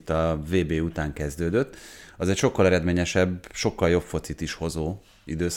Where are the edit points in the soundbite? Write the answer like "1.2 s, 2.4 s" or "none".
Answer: none